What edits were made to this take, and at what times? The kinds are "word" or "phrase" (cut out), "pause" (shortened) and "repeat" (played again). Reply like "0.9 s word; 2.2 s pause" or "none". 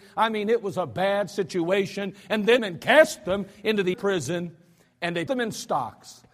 2.6 s phrase; 3.9 s word; 5.3 s word

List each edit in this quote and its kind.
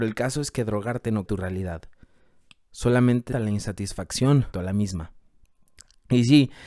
1.3 s word; 3.3 s word; 4.5 s word

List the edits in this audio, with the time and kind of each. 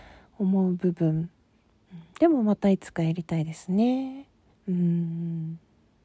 4.5 s pause

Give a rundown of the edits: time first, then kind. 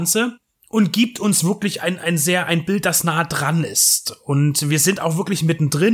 none

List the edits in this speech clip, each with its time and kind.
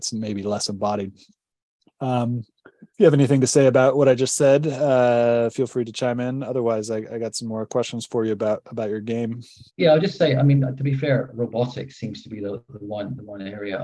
2.9 s pause; 9.7 s pause

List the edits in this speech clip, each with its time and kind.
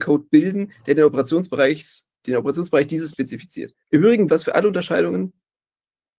2.2 s pause; 3.1 s word; 3.8 s pause; 4.3 s word

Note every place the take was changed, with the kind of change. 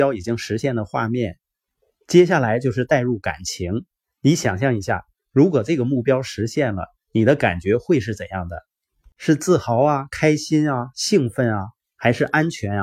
none

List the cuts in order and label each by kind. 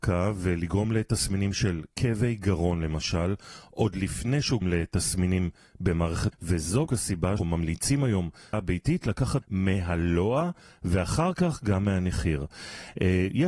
4.6 s word; 6.3 s word; 6.9 s word; 7.4 s word; 8.5 s word; 9.4 s word

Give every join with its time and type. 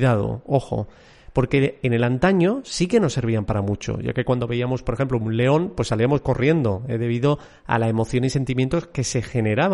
none

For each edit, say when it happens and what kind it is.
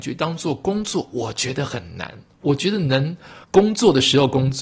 3.4 s pause

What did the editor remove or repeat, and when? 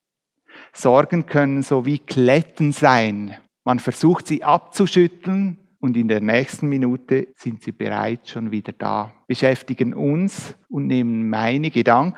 3.4 s pause; 5.7 s pause; 7.3 s pause; 9.2 s pause; 10.6 s pause

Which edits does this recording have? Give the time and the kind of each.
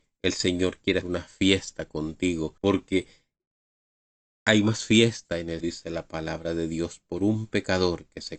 1.0 s word; 2.6 s pause; 5.6 s word

